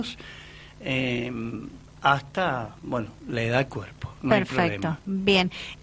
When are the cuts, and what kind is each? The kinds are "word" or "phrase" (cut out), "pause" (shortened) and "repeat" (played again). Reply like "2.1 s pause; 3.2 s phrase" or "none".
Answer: 3.7 s phrase